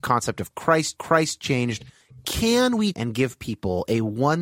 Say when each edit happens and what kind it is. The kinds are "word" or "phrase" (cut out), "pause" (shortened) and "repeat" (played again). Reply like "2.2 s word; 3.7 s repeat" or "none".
1.0 s repeat; 2.9 s word